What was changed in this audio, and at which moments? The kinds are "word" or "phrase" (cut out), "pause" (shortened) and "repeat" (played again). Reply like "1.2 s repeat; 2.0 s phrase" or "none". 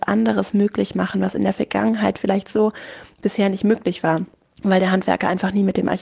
4.3 s pause